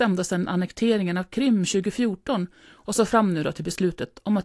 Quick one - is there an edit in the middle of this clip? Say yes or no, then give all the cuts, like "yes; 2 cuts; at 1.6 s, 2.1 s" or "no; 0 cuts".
no; 0 cuts